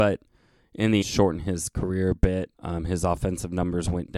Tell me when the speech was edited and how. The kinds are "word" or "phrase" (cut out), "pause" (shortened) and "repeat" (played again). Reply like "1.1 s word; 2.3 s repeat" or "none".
1.0 s phrase; 2.5 s pause